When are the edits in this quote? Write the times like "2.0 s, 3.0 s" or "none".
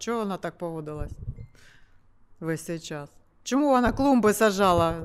none